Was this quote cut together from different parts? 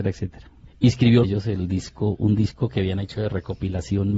yes; 1 cut; at 1.2 s

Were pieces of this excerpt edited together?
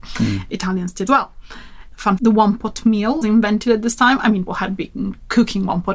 yes; 4 cuts; at 1.1 s, 2.2 s, 3.2 s, 4.5 s

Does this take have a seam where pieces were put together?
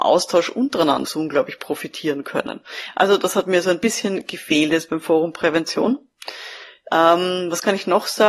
yes; 1 cut; at 1.0 s

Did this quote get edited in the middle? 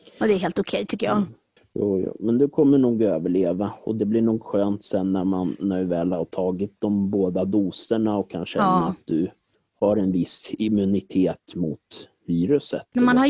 yes; 2 cuts; at 1.6 s, 9.5 s

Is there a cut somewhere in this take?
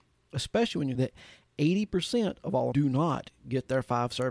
yes; 2 cuts; at 0.9 s, 2.7 s

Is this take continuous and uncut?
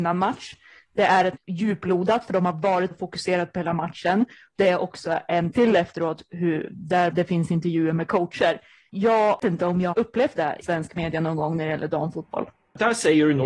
no; 8 cuts; at 1.4 s, 2.9 s, 4.6 s, 5.5 s, 7.1 s, 9.4 s, 9.9 s, 10.6 s

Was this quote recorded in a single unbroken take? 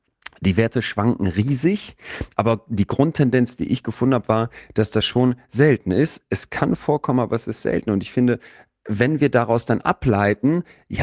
yes; 0 cuts

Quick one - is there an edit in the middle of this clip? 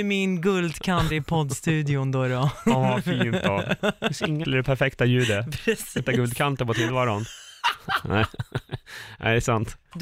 yes; 3 cuts; at 1.1 s, 4.4 s, 6.0 s

